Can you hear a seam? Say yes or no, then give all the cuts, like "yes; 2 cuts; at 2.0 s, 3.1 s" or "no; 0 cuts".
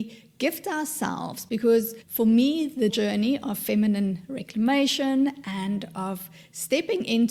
no; 0 cuts